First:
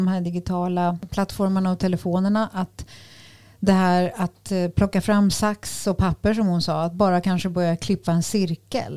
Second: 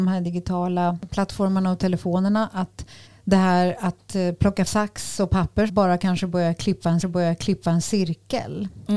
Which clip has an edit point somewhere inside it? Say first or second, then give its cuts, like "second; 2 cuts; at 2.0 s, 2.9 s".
second; 4 cuts; at 3.1 s, 4.7 s, 5.7 s, 7.0 s